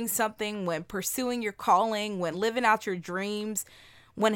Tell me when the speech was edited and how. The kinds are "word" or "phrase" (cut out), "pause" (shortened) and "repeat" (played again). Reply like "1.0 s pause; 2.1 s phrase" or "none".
none

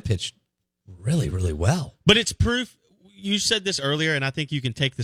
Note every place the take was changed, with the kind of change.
none

